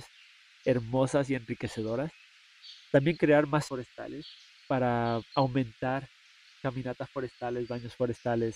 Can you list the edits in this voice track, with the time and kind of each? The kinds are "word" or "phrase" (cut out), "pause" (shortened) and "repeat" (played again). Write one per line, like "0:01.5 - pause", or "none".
0:03.2 - word
0:03.7 - word
0:05.3 - word
0:06.5 - word